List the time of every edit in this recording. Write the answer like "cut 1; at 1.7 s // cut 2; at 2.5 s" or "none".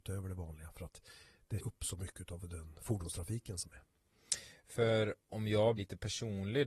cut 1; at 1.6 s // cut 2; at 5.2 s // cut 3; at 5.8 s